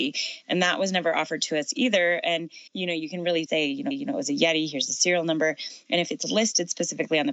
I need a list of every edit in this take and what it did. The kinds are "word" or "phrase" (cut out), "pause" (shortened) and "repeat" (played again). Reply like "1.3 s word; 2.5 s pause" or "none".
2.7 s pause; 3.5 s word; 3.9 s repeat

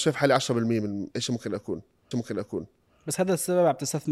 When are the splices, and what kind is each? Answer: 1.1 s pause; 2.1 s repeat

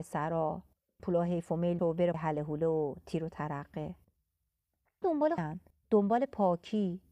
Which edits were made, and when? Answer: 1.0 s word; 1.8 s word; 2.1 s word; 5.0 s word; 5.4 s word

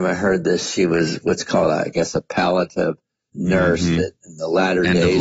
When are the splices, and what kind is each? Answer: 3.3 s word

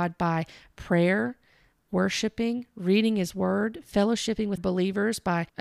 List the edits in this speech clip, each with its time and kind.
4.6 s word

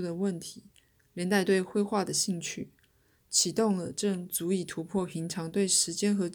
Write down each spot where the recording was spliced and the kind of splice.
none

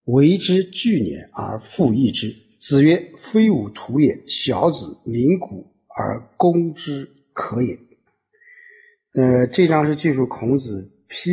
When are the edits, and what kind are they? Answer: 8.1 s pause

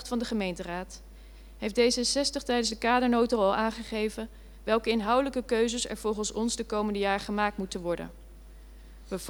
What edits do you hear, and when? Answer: none

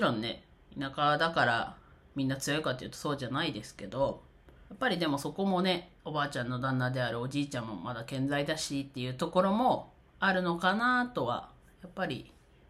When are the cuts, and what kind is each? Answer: 4.7 s pause; 6.0 s pause

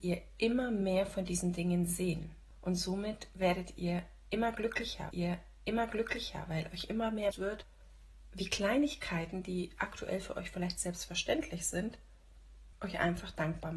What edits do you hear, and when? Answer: 5.1 s repeat; 7.3 s word

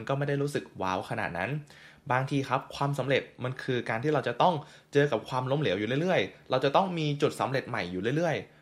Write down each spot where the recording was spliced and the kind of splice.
none

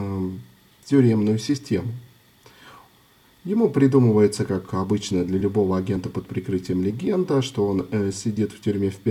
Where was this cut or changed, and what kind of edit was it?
none

